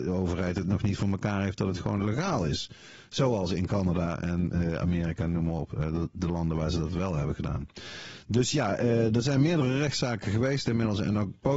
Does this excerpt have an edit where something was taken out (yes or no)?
no